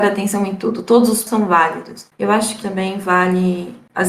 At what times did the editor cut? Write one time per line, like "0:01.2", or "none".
0:01.3
0:02.1
0:02.6